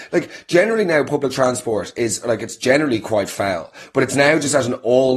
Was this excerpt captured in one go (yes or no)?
yes